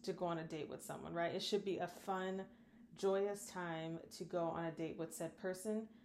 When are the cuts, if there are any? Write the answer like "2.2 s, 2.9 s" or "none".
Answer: none